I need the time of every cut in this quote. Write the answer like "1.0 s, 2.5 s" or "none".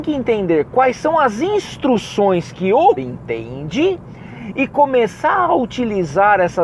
3.0 s